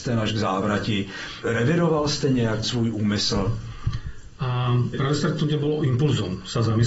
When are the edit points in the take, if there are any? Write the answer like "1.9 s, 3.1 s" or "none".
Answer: 1.4 s, 2.6 s, 4.9 s

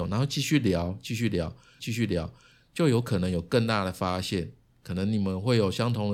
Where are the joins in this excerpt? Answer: 1.8 s

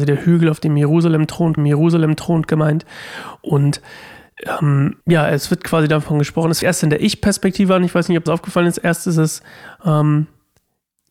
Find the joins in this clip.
1.6 s, 5.0 s, 6.6 s, 8.3 s

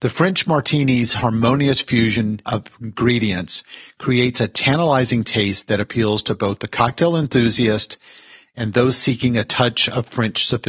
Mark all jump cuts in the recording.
none

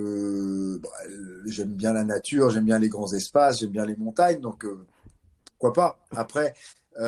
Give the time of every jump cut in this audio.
none

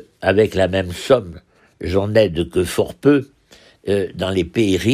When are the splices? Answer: none

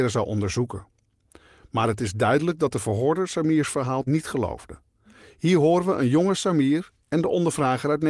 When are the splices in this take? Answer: 4.1 s

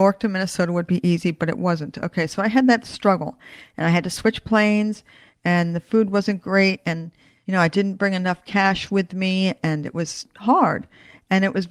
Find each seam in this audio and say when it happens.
none

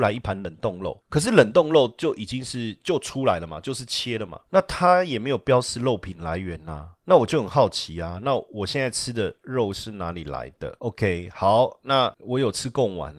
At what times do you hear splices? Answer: none

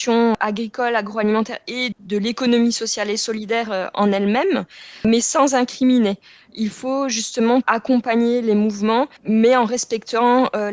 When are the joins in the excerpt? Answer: 1.9 s, 7.6 s, 9.2 s

